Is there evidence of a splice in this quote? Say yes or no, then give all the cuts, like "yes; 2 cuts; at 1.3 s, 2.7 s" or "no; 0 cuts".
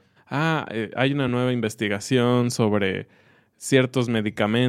no; 0 cuts